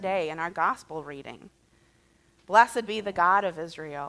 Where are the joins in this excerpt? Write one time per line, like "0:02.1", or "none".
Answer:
none